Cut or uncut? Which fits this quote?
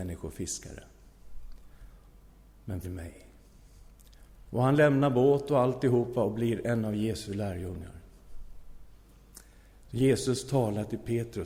cut